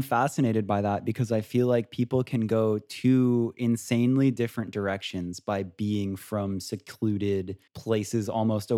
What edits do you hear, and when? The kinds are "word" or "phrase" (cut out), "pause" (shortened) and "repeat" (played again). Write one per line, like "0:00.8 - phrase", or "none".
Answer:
0:07.7 - pause